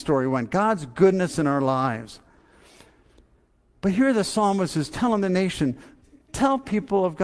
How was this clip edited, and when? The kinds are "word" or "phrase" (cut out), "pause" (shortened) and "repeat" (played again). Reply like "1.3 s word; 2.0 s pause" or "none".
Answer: none

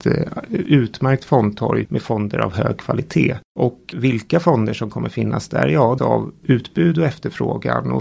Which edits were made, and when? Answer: 3.9 s word; 6.0 s phrase; 6.4 s word

